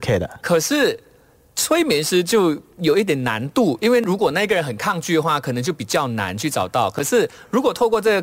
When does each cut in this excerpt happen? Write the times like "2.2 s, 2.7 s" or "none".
none